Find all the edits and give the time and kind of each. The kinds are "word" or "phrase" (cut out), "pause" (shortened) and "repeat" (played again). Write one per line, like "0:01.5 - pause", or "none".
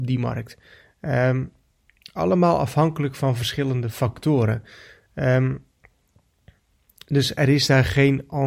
none